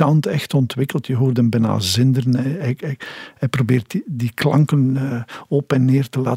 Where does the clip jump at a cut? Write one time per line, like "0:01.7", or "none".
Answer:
none